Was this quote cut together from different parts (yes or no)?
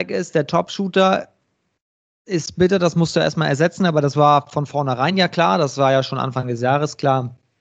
no